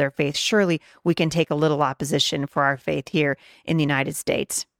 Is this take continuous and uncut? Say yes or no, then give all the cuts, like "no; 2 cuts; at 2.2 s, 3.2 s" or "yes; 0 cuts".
yes; 0 cuts